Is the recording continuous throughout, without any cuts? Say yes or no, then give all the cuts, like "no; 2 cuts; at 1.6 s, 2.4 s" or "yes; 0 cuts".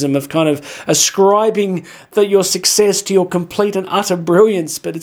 yes; 0 cuts